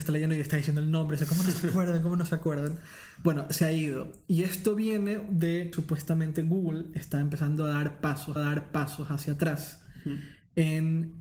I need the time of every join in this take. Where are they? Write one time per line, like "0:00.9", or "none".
0:05.7
0:08.4